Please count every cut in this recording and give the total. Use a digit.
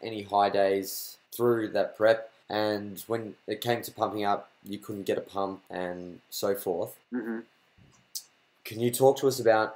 4